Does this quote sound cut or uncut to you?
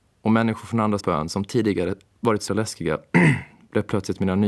cut